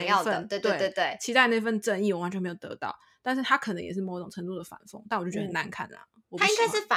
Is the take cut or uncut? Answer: uncut